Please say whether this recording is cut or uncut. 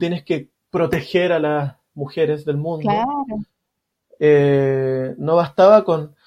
uncut